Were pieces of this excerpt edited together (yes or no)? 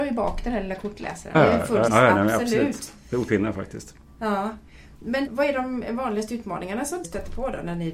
yes